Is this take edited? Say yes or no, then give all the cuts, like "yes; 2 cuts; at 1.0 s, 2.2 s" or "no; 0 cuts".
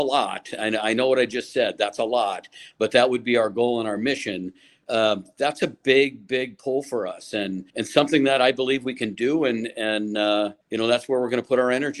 yes; 2 cuts; at 7.7 s, 10.6 s